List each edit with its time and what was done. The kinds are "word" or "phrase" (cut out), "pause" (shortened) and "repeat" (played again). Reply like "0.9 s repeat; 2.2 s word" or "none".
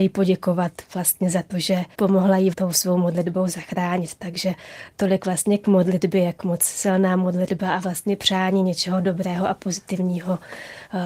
1.9 s pause; 2.5 s word